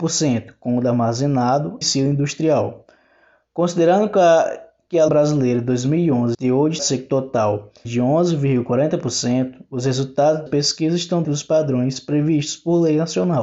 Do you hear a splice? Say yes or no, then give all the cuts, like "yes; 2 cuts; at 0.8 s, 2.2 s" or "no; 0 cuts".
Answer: yes; 7 cuts; at 1.8 s, 5.1 s, 6.3 s, 6.8 s, 7.8 s, 10.5 s, 11.2 s